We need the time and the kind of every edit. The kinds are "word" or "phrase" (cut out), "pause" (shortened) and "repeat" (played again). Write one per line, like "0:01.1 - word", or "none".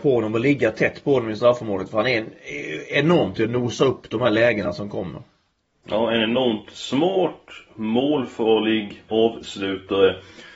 0:09.1 - word